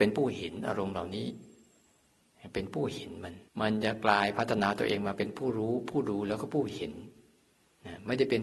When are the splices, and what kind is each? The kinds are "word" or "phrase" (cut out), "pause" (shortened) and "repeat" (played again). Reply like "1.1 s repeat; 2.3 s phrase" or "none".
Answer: 3.5 s pause